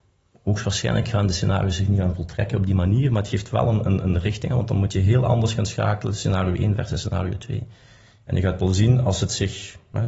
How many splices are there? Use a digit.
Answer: 0